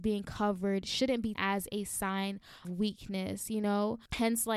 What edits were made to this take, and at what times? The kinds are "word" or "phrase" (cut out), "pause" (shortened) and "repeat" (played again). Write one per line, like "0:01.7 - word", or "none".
0:01.3 - word
0:02.6 - word